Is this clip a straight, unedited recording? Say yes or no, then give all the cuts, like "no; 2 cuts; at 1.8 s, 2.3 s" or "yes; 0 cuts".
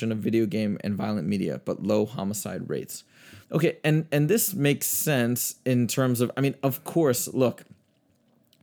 no; 1 cut; at 3.4 s